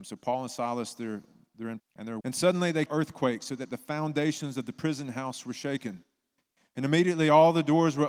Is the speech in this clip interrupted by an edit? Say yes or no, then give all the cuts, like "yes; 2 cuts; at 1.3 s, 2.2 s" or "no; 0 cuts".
yes; 3 cuts; at 1.8 s, 2.2 s, 2.9 s